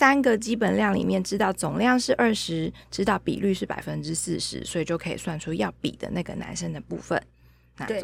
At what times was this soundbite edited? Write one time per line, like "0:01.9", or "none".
none

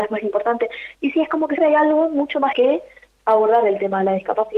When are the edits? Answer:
0:01.6
0:02.5

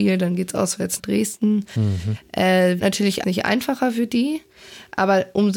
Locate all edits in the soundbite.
0:01.0
0:02.8
0:03.2

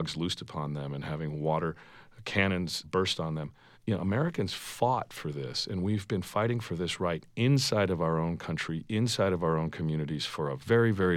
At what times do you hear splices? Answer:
0:02.8
0:03.7

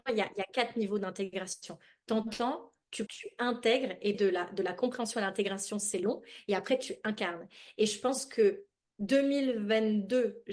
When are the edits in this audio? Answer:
0:03.1
0:04.1
0:08.8

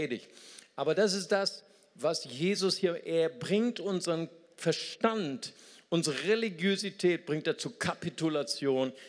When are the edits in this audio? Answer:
none

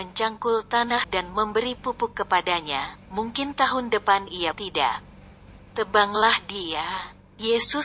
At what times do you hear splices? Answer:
0:01.0
0:03.1
0:04.5
0:05.7

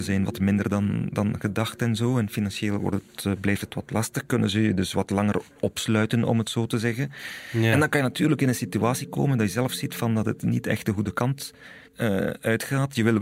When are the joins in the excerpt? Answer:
0:11.9

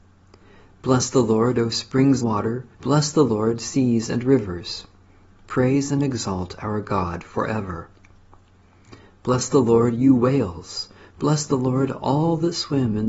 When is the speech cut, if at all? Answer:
0:02.2
0:02.7

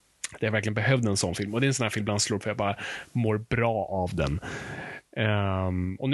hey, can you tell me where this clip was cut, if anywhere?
0:02.0
0:02.4

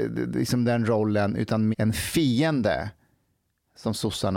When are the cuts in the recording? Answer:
0:01.7

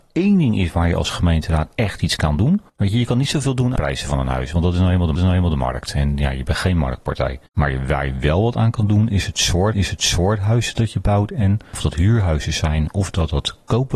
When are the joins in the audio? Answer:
0:02.7
0:03.8
0:05.2
0:07.5
0:09.7

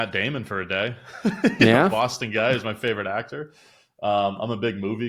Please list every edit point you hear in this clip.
none

